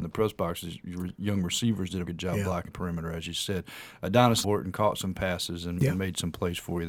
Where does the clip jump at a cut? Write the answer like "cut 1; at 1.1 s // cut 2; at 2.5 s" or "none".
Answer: cut 1; at 2.1 s // cut 2; at 2.7 s // cut 3; at 4.4 s